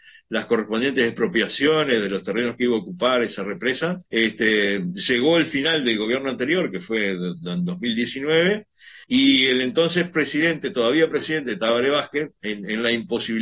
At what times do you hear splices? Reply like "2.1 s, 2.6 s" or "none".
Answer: 4.1 s, 9.0 s